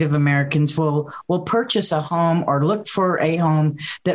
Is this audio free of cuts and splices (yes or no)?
yes